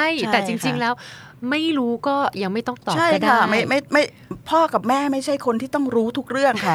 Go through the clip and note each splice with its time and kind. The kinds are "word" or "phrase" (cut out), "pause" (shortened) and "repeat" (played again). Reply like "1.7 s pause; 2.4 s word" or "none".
none